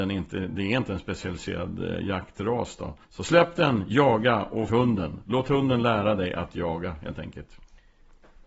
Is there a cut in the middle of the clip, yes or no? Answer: yes